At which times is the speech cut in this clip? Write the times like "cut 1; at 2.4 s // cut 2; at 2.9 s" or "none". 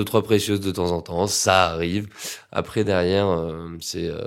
none